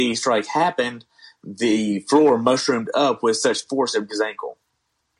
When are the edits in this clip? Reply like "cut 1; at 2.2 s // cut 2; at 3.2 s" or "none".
cut 1; at 4.1 s